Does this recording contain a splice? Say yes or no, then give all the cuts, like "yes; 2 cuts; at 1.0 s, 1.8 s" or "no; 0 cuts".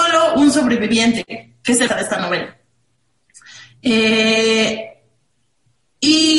yes; 1 cut; at 1.9 s